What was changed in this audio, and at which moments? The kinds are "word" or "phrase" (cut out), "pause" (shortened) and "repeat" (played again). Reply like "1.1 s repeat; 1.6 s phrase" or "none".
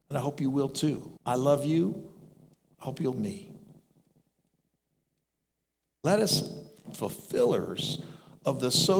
1.2 s pause; 3.1 s word; 6.9 s phrase